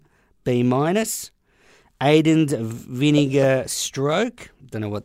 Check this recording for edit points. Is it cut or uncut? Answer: uncut